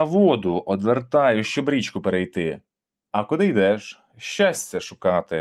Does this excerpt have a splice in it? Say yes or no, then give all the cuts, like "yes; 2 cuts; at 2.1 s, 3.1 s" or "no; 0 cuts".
no; 0 cuts